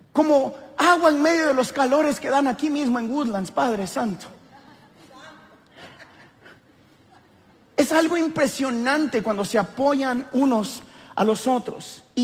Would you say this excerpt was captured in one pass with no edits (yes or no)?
yes